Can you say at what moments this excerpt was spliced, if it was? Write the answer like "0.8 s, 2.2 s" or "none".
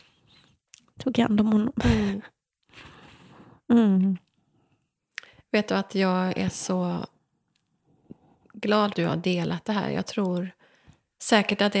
8.9 s